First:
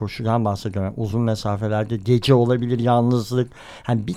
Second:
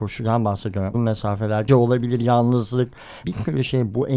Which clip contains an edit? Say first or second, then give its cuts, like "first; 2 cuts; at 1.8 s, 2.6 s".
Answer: second; 3 cuts; at 0.9 s, 1.7 s, 3.2 s